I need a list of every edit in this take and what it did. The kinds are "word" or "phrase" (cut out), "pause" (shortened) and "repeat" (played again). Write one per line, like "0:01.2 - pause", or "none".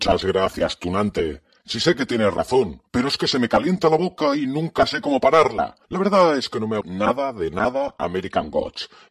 0:02.9 - pause
0:05.8 - pause
0:06.8 - word